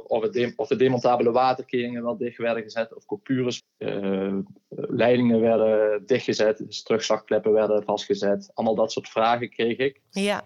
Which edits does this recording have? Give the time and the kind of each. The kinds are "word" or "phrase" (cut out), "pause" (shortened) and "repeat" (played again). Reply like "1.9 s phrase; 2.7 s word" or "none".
3.6 s phrase